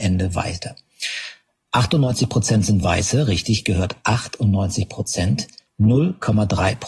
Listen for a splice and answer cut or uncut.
uncut